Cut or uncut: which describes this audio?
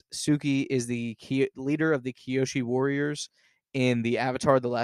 uncut